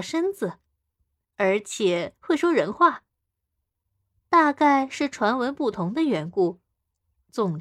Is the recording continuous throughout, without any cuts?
yes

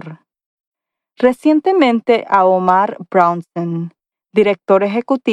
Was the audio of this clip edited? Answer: yes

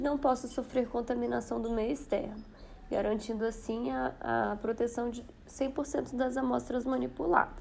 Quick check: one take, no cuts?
yes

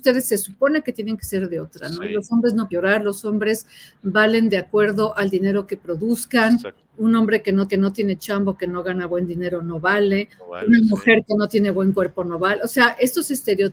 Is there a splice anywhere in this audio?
yes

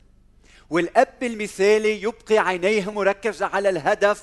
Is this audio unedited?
yes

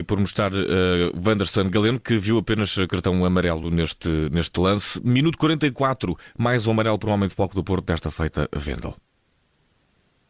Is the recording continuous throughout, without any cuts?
yes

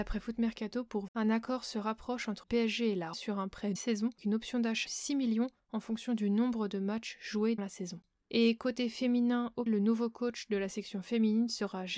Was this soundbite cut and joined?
yes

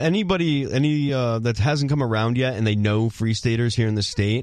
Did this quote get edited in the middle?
no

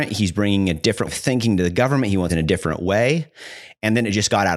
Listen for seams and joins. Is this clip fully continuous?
no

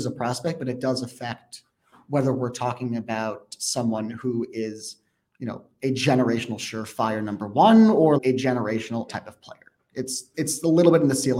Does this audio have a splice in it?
yes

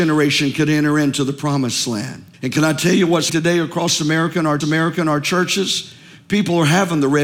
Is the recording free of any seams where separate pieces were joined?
no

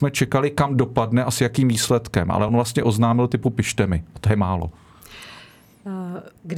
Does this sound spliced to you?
no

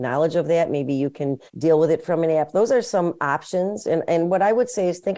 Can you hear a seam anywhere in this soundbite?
yes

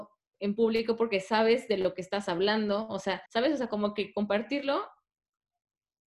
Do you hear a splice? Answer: yes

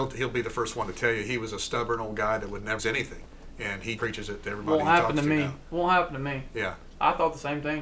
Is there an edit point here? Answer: yes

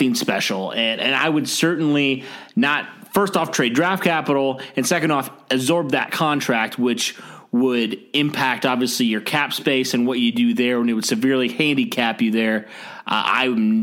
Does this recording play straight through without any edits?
yes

